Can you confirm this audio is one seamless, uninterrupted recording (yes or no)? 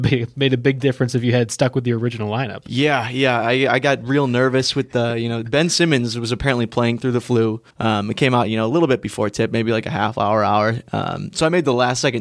no